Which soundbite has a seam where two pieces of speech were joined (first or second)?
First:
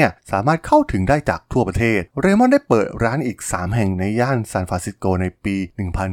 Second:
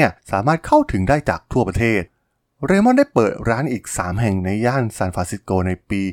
first